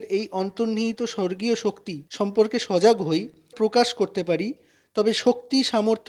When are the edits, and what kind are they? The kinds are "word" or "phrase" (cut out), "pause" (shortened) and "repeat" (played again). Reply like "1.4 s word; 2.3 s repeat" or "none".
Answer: 1.2 s word; 2.1 s pause; 3.5 s phrase